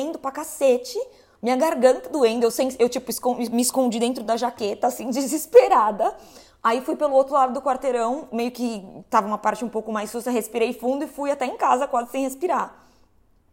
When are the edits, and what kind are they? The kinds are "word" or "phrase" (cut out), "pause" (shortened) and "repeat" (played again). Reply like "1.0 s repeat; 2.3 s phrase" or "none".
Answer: none